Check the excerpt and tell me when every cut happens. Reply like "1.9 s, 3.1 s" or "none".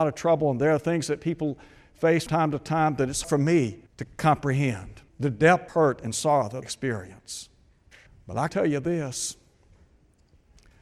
2.3 s, 3.2 s, 3.9 s, 5.1 s, 5.7 s, 6.6 s, 8.1 s, 8.5 s